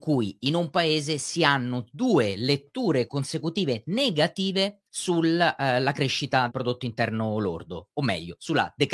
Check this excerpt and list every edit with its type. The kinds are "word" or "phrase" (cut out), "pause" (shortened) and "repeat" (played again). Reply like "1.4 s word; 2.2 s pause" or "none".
3.1 s word; 4.9 s pause; 6.5 s word